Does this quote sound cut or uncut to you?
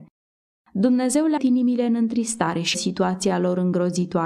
cut